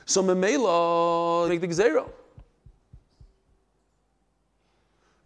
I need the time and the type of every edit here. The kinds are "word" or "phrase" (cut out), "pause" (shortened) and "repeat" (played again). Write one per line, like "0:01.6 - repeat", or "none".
0:01.5 - phrase